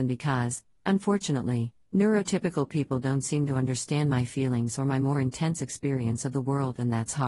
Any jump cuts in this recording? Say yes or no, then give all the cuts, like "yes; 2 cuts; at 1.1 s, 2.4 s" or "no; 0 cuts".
no; 0 cuts